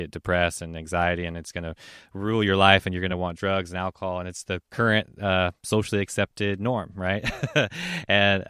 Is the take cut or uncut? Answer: uncut